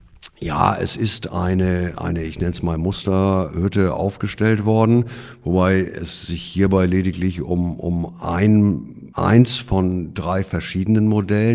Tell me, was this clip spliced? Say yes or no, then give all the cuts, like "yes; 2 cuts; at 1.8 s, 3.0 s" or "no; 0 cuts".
yes; 1 cut; at 9.1 s